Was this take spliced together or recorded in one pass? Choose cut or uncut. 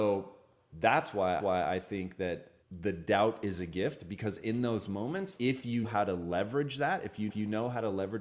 cut